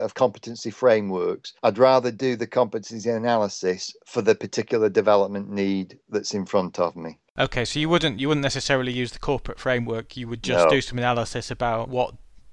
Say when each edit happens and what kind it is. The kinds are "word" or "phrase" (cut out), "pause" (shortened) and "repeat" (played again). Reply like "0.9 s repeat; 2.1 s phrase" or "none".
1.6 s pause; 7.3 s pause